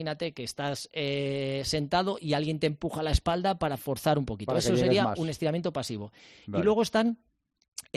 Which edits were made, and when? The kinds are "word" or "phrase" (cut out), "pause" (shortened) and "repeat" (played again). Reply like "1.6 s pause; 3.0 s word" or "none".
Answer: none